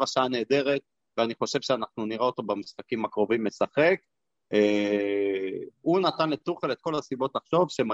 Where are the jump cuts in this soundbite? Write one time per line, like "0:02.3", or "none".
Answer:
none